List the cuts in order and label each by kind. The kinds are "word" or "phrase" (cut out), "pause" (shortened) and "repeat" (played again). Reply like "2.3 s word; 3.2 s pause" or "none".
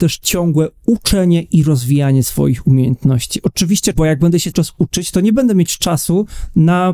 3.9 s phrase; 4.5 s word

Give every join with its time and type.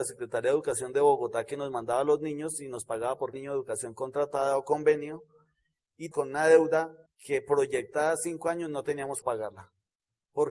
3.3 s word; 6.1 s word; 7.1 s pause; 9.2 s word

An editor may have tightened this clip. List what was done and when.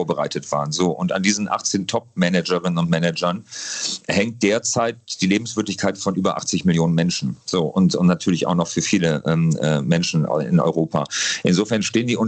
none

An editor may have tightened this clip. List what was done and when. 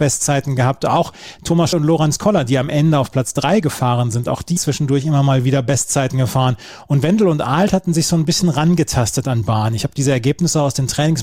1.7 s word; 4.6 s word; 9.4 s word

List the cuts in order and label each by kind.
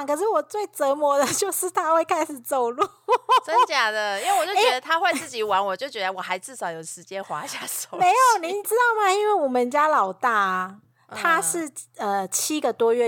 none

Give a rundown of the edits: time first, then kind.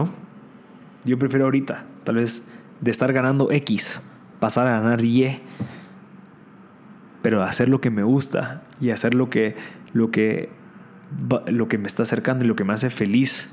none

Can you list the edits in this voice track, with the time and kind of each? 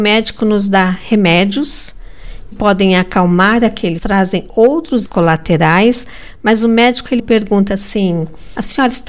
2.5 s word; 4.0 s phrase; 5.1 s word; 7.2 s word

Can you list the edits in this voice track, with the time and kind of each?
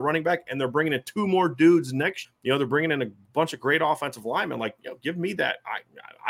2.2 s word

